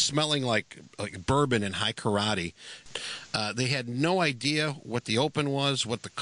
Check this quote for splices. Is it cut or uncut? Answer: uncut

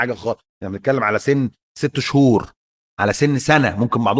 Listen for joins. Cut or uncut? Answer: cut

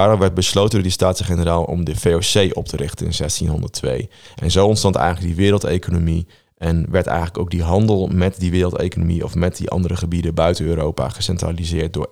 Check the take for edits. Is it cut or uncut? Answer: uncut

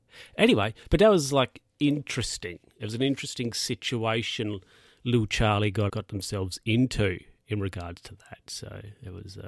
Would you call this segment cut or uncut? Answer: cut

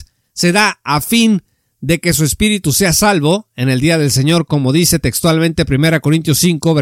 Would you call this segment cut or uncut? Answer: uncut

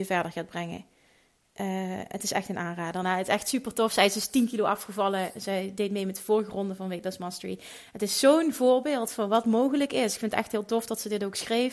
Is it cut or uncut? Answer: uncut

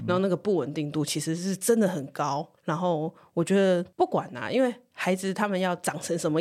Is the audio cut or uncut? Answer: cut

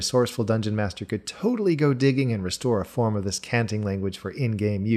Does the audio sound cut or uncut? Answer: uncut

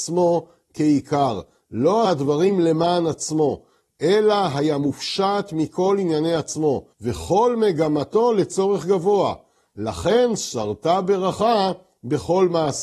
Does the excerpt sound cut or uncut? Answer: cut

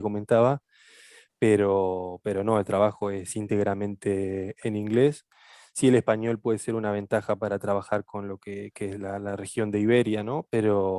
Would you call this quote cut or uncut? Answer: uncut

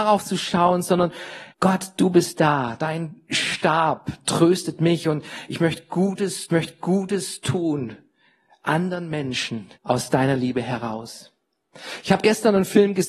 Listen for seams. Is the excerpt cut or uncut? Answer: cut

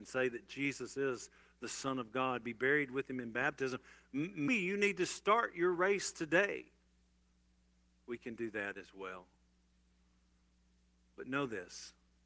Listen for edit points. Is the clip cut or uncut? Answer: cut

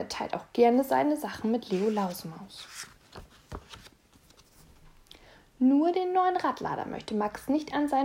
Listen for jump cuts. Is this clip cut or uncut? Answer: uncut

